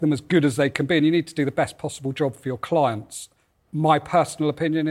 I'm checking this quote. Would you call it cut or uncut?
uncut